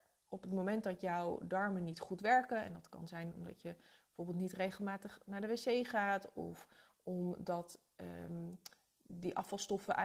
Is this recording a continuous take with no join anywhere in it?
yes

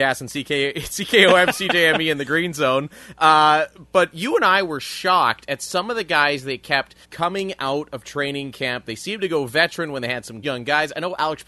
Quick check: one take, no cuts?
no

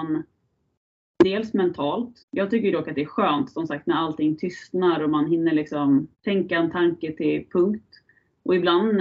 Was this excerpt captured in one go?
no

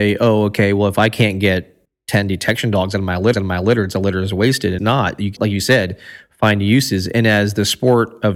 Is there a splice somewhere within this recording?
yes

